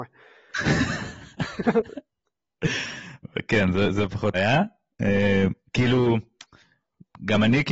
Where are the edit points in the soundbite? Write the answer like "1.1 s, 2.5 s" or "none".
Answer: 4.3 s